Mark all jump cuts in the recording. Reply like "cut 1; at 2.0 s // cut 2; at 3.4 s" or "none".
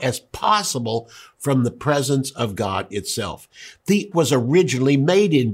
cut 1; at 4.1 s